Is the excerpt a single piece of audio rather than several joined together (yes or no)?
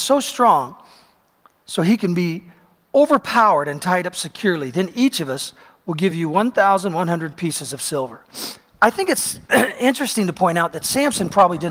yes